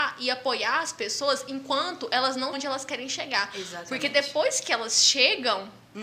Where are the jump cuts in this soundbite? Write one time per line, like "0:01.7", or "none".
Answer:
0:02.5